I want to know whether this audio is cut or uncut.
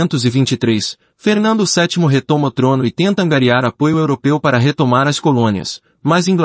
uncut